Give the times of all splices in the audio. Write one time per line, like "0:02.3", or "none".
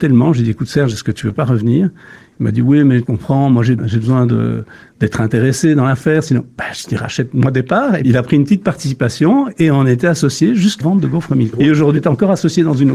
0:03.0
0:03.8
0:08.0
0:10.8
0:11.5
0:12.0